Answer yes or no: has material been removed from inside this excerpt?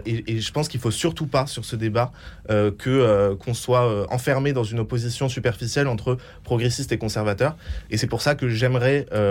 no